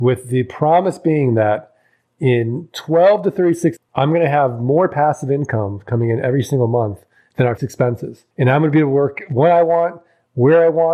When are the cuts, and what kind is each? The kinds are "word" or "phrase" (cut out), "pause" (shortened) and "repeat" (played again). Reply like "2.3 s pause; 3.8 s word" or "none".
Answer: 3.8 s word; 7.6 s word; 8.3 s pause